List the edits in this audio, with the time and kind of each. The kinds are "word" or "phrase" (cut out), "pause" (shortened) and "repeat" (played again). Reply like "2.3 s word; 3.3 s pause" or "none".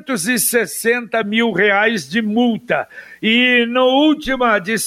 none